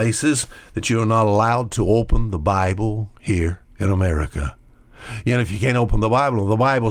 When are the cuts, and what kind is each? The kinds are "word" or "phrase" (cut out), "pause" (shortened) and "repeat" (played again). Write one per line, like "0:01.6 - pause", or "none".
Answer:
0:03.7 - pause